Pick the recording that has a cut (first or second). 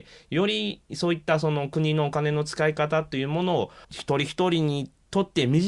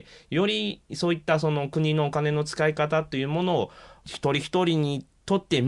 first